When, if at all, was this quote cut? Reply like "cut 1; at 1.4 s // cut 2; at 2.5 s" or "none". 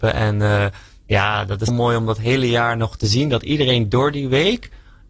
cut 1; at 1.7 s